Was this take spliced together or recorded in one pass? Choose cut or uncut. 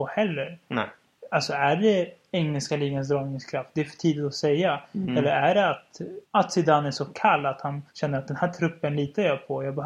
cut